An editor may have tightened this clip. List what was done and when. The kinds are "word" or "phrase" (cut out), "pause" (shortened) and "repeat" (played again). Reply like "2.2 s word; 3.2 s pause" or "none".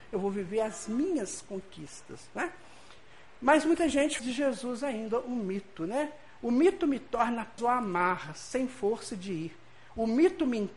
4.2 s word; 7.6 s word